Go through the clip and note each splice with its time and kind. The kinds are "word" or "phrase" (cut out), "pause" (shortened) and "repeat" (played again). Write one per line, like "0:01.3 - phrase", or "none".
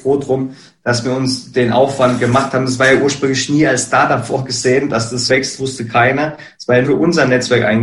0:05.3 - word
0:06.8 - word